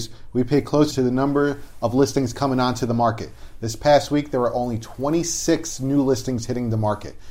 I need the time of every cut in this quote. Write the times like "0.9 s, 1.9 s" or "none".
0.9 s